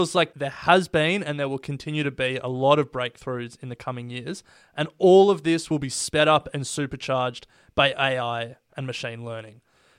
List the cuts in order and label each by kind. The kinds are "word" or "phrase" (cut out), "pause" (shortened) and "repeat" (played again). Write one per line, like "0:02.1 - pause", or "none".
none